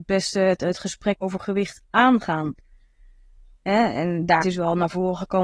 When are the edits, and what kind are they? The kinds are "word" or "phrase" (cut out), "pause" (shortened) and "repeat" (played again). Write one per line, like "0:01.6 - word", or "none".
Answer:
0:01.2 - word
0:04.4 - word